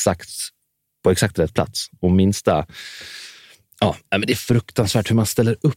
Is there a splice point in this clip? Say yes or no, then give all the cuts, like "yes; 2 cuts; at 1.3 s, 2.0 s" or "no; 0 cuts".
no; 0 cuts